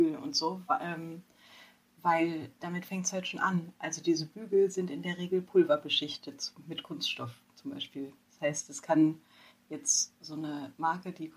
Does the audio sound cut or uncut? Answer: uncut